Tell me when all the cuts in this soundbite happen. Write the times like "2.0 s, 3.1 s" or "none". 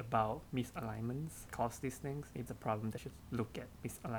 1.5 s, 2.5 s, 3.0 s